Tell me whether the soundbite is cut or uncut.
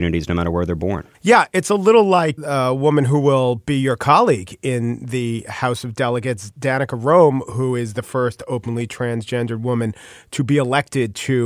cut